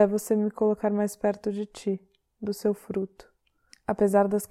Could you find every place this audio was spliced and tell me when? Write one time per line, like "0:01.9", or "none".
none